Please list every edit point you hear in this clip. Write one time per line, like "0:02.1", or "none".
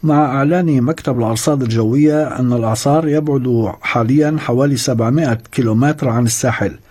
none